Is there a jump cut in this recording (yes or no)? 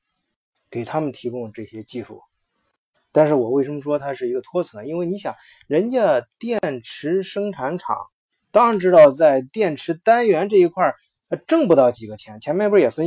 no